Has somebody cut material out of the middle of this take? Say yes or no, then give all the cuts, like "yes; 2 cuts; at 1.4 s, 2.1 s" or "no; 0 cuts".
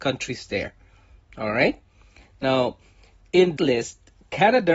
yes; 1 cut; at 3.6 s